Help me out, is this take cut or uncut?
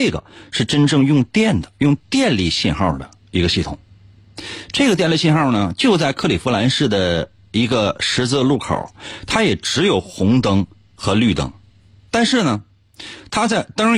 uncut